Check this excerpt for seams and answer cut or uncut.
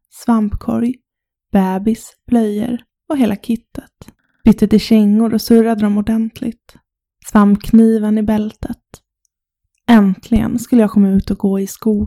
uncut